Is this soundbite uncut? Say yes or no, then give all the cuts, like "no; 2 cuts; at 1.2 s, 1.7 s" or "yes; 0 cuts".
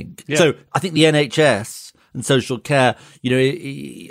yes; 0 cuts